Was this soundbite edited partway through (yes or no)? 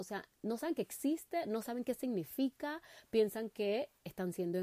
no